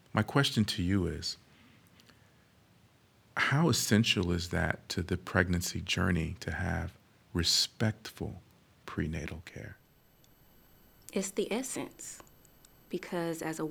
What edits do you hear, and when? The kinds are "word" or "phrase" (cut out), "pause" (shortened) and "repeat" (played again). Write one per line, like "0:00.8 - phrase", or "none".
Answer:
none